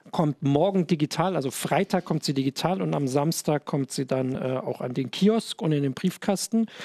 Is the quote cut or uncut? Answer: uncut